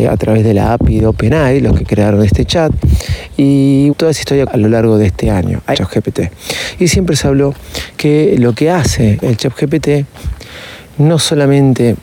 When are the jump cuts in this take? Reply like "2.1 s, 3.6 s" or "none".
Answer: 3.9 s, 4.5 s, 5.7 s, 9.2 s